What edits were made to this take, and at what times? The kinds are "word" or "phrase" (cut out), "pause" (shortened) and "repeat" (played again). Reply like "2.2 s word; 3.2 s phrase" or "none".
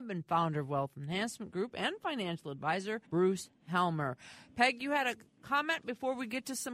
3.0 s pause